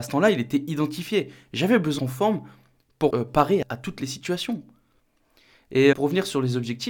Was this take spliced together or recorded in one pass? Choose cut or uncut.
cut